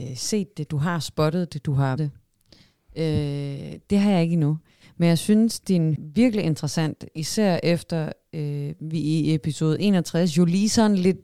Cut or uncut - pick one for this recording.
cut